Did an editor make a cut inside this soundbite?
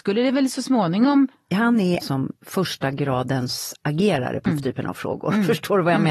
yes; 4 cuts; at 2.0 s, 2.4 s, 3.8 s, 4.5 s

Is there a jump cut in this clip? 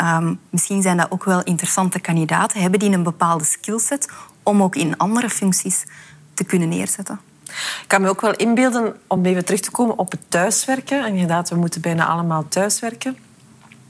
no; 0 cuts

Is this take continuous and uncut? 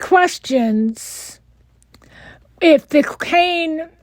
yes; 0 cuts

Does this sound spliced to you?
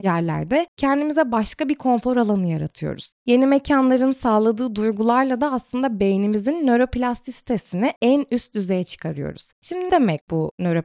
yes; 1 cut; at 9.9 s

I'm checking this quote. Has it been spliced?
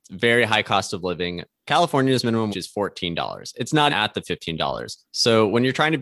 yes; 3 cuts; at 2.5 s, 3.9 s, 5.1 s

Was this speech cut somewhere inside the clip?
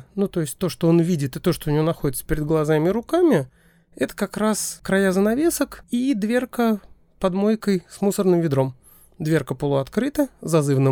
no; 0 cuts

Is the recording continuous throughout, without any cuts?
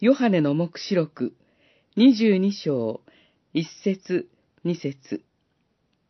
yes; 0 cuts

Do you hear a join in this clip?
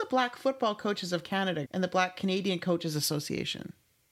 yes; 1 cut; at 1.7 s

